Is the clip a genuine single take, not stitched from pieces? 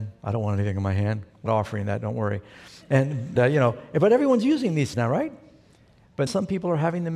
no; 4 cuts; at 1.5 s, 3.4 s, 4.9 s, 6.3 s

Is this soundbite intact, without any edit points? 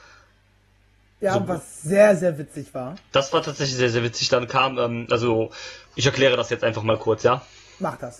no; 1 cut; at 5.9 s

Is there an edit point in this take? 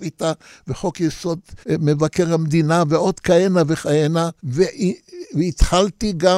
yes; 2 cuts; at 1.6 s, 4.4 s

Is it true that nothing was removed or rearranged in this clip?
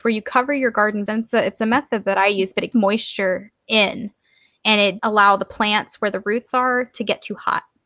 no; 3 cuts; at 1.1 s, 2.7 s, 5.0 s

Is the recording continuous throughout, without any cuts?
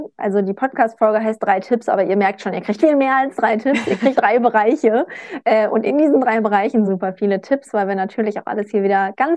no; 3 cuts; at 2.8 s, 4.2 s, 6.9 s

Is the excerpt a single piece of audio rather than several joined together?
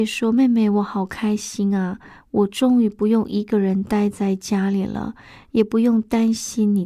yes; 0 cuts

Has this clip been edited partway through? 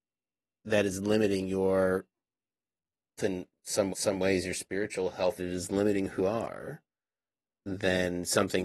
yes; 4 cuts; at 3.2 s, 3.9 s, 5.4 s, 6.2 s

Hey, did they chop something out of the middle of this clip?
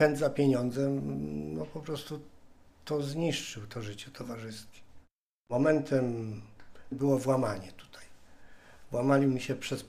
yes; 1 cut; at 6.9 s

